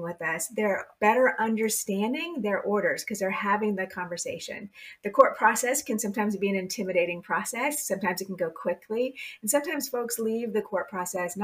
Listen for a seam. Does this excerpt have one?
no; 0 cuts

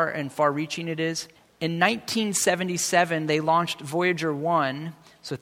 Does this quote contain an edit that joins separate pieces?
yes; 1 cut; at 1.4 s

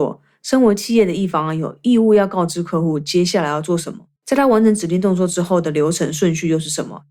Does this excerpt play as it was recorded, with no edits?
no; 1 cut; at 4.2 s

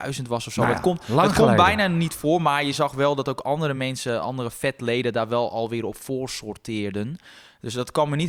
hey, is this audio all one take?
yes; 0 cuts

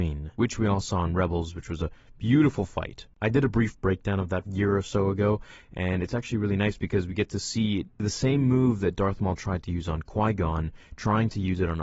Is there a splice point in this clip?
yes; 1 cut; at 4.5 s

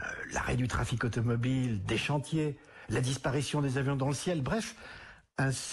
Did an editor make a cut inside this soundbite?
no; 0 cuts

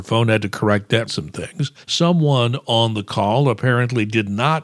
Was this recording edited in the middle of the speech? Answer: yes; 2 cuts; at 1.1 s, 1.8 s

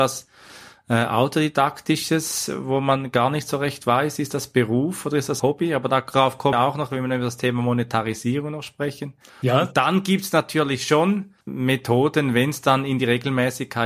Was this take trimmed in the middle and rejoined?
yes; 4 cuts; at 5.4 s, 6.5 s, 9.3 s, 11.4 s

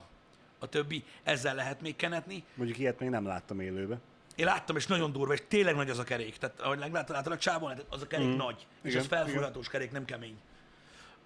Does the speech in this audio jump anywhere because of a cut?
no; 0 cuts

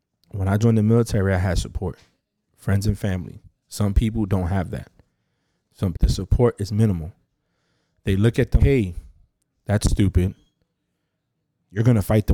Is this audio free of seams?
no; 2 cuts; at 5.9 s, 8.6 s

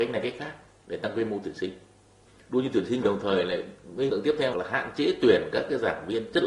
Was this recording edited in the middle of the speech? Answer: yes; 3 cuts; at 3.0 s, 4.1 s, 4.5 s

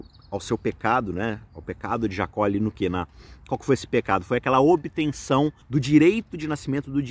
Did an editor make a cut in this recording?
yes; 1 cut; at 5.6 s

